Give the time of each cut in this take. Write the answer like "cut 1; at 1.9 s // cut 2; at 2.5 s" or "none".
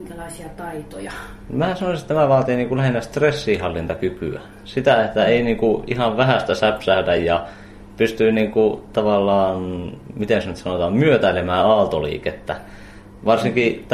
none